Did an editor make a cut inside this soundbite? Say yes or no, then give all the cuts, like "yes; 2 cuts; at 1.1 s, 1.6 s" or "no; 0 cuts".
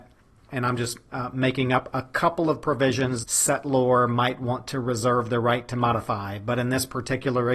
yes; 1 cut; at 3.2 s